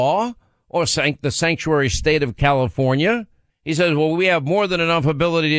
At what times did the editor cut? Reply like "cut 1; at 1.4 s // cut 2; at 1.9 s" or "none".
cut 1; at 3.5 s